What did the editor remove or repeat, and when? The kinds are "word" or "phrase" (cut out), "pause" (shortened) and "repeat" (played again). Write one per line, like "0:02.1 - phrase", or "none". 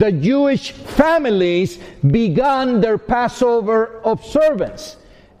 none

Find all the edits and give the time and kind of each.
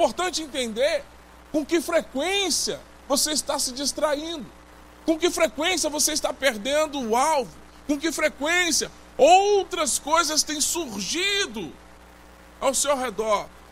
none

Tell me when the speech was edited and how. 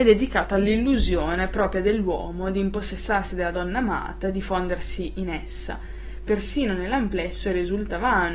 none

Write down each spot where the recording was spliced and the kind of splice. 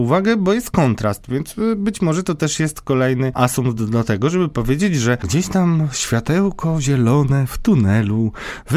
none

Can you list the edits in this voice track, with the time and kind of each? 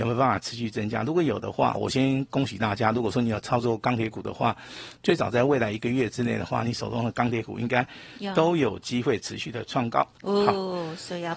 0:01.8 - word

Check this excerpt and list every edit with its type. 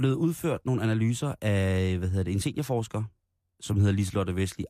none

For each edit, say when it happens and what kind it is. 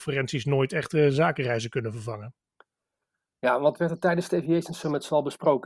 none

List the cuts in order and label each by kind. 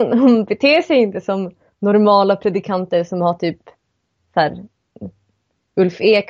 none

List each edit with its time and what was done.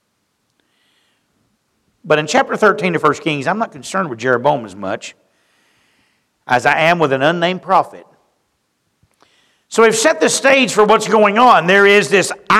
none

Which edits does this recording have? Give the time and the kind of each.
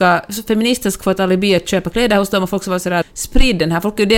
0:03.0 - word

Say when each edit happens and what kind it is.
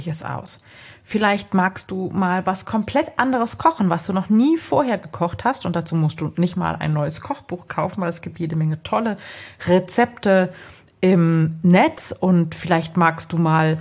none

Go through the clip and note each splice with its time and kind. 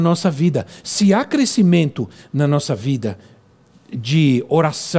none

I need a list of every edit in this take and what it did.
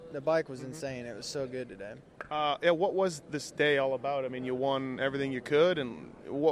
none

